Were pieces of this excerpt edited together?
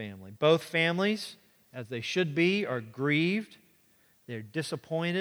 no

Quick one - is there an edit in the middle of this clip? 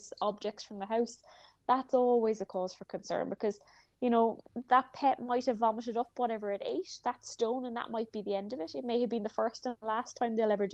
no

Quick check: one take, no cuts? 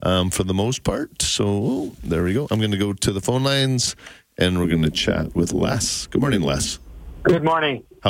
yes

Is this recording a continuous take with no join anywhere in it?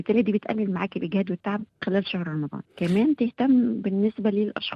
no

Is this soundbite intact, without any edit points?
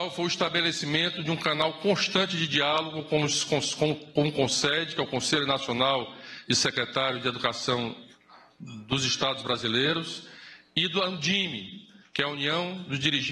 yes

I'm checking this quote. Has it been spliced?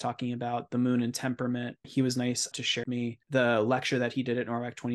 yes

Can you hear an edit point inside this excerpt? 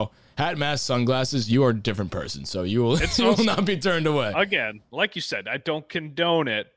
no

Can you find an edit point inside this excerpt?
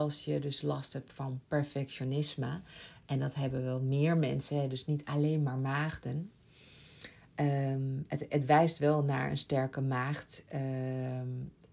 no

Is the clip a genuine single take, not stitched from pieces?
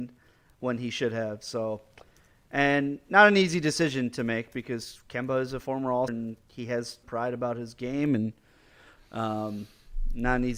no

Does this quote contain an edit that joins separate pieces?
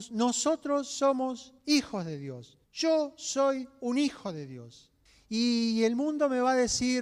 yes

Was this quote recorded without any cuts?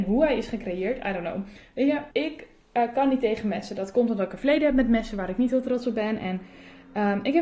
no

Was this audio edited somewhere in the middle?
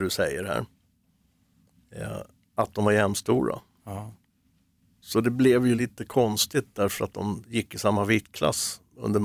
no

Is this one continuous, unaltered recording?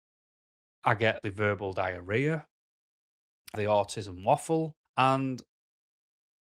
no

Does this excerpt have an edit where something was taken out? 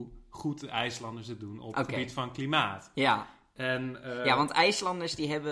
no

